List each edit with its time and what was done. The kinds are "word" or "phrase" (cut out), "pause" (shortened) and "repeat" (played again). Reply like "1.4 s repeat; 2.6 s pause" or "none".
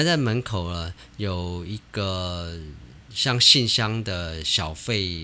3.0 s pause